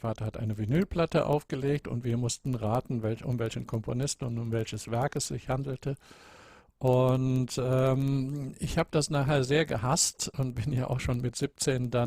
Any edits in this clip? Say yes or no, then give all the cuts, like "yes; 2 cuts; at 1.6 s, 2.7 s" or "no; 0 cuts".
no; 0 cuts